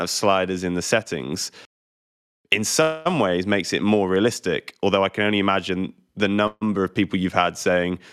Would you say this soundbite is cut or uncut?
uncut